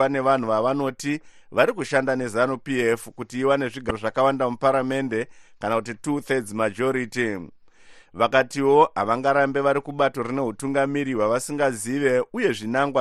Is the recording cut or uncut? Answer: uncut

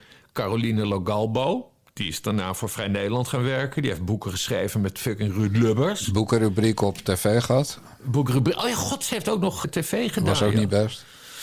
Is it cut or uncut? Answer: cut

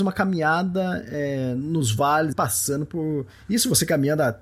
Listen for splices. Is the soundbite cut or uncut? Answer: cut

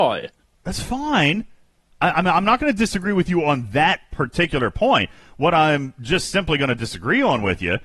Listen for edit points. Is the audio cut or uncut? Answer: uncut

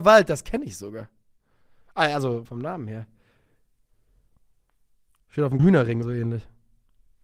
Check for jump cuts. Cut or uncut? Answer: cut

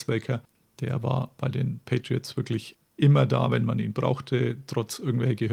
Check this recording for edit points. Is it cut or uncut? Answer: uncut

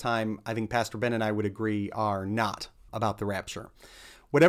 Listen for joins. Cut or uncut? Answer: cut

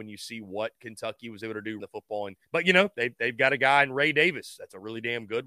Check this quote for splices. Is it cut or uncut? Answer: cut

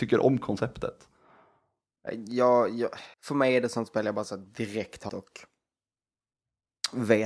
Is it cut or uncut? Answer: cut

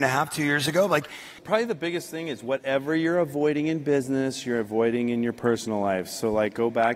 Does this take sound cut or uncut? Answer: cut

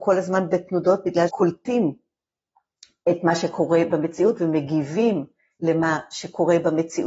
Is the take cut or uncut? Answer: cut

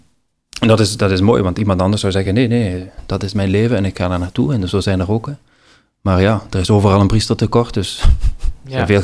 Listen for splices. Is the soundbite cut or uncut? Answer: uncut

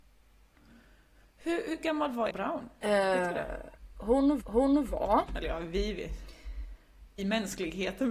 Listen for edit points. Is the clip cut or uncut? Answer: cut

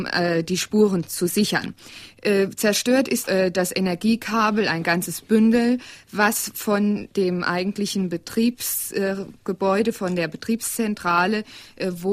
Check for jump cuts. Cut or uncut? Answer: cut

